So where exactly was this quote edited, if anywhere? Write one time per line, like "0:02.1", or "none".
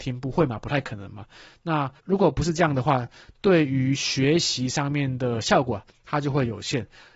none